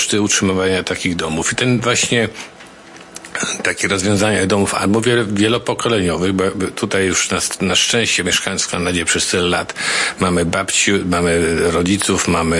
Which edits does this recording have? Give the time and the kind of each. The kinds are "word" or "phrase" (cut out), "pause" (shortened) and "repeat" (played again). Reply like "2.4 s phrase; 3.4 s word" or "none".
none